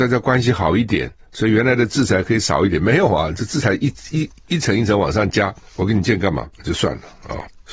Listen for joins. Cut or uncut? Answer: cut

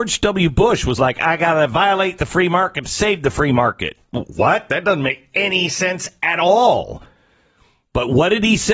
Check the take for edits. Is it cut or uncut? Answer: uncut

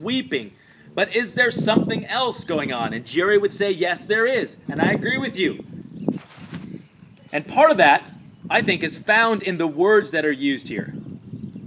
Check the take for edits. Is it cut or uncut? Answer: uncut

